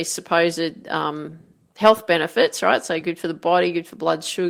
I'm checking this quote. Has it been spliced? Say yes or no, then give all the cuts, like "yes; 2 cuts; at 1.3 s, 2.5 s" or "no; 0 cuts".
no; 0 cuts